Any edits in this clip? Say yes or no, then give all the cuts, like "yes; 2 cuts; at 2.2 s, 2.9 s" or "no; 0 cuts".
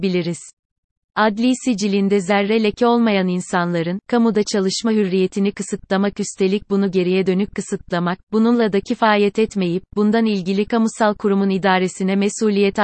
no; 0 cuts